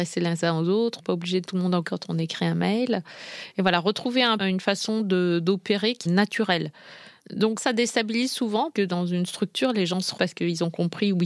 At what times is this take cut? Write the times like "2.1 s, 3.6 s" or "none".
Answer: 1.0 s, 1.5 s, 1.8 s, 4.4 s, 6.1 s, 7.6 s, 8.7 s, 10.2 s